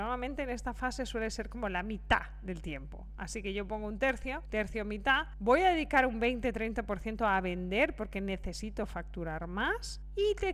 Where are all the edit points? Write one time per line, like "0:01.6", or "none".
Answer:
none